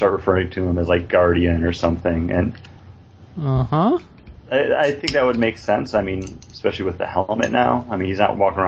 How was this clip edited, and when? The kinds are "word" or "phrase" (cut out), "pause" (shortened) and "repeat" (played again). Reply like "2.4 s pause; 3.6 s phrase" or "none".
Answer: none

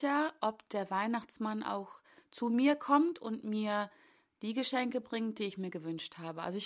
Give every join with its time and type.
none

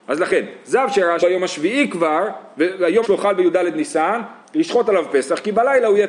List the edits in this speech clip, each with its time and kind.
1.2 s phrase; 3.0 s word; 4.4 s word

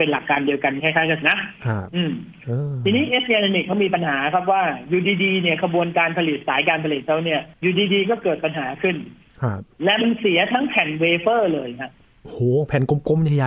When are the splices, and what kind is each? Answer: 1.2 s word; 7.5 s pause; 9.7 s pause

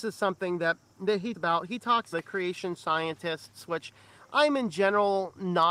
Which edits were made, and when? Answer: 1.3 s word; 2.1 s phrase

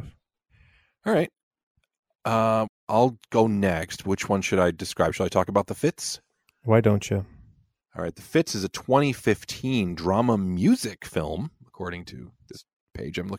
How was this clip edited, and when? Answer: none

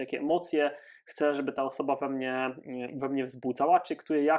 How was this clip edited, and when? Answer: none

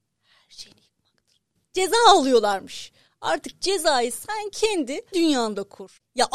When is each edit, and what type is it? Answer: 5.1 s word

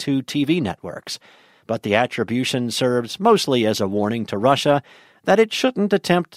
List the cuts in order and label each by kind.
none

